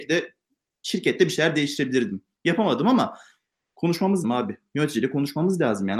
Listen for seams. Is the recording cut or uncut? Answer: cut